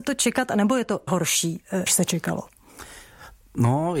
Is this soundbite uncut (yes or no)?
no